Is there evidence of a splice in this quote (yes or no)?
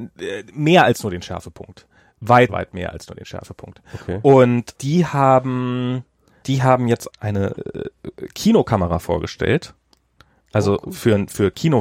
yes